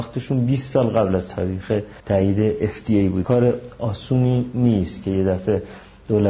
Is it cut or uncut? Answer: cut